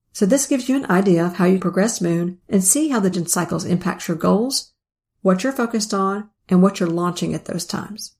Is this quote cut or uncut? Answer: cut